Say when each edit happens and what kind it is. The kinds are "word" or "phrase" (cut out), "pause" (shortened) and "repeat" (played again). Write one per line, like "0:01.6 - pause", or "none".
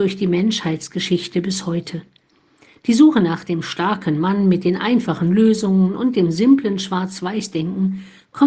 none